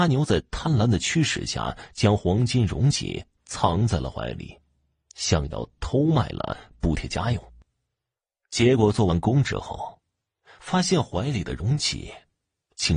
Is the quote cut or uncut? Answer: uncut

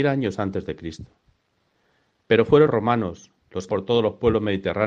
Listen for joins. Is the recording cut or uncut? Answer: cut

